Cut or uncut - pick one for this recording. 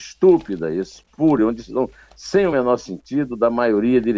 uncut